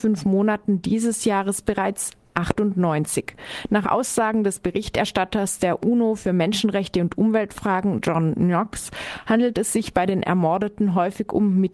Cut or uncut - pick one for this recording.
uncut